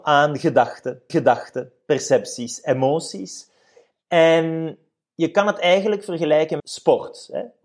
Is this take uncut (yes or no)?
no